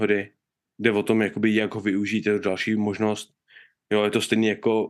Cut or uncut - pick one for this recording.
uncut